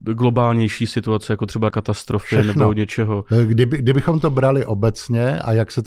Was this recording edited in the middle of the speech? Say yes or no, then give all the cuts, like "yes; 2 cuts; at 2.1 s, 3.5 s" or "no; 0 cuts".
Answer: yes; 1 cut; at 1.7 s